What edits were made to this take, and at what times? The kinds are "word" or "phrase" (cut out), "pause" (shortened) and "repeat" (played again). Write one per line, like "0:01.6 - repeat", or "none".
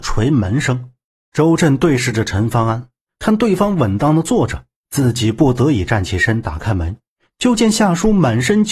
0:01.1 - pause